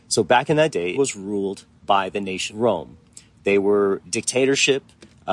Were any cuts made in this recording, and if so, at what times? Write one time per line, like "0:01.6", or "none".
0:00.9
0:02.5
0:04.0